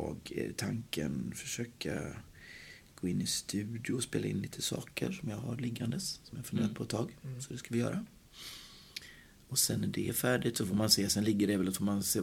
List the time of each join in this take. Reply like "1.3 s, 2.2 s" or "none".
none